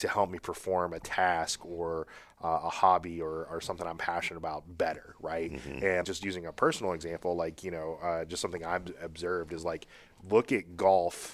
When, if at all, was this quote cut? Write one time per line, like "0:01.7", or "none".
0:06.0